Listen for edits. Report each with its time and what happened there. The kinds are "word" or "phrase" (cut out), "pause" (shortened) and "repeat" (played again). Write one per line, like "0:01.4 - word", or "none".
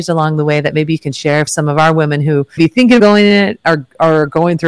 0:01.5 - word
0:02.6 - word
0:03.0 - word